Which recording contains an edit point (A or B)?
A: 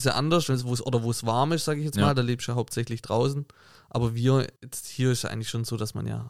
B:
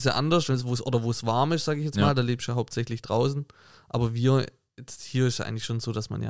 A